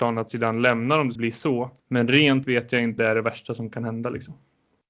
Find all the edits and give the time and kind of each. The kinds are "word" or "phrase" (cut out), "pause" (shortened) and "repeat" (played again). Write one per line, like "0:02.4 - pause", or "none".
0:01.1 - word
0:01.8 - pause
0:02.4 - word
0:03.0 - word